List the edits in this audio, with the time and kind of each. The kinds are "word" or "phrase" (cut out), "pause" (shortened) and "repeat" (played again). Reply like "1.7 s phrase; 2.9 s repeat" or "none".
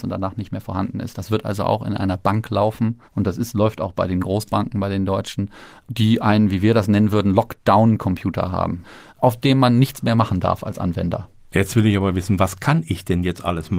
3.1 s pause